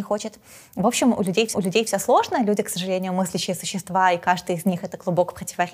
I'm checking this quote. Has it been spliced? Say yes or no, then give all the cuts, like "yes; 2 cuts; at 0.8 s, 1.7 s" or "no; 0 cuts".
yes; 1 cut; at 1.5 s